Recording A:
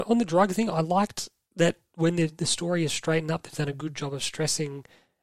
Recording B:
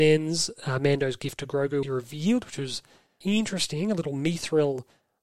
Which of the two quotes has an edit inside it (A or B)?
B